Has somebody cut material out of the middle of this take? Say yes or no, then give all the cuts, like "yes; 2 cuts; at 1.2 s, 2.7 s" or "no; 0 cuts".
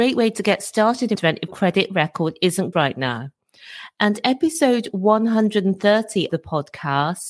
yes; 5 cuts; at 1.1 s, 1.5 s, 2.7 s, 4.2 s, 6.3 s